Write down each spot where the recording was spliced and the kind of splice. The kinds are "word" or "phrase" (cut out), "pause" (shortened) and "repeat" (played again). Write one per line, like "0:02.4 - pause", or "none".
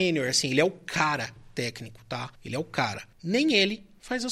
0:02.4 - pause
0:03.1 - pause